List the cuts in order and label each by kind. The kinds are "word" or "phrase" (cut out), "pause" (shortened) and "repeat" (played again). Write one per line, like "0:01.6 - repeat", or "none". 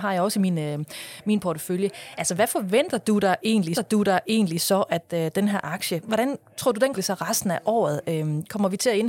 0:03.7 - repeat
0:06.0 - word
0:07.0 - phrase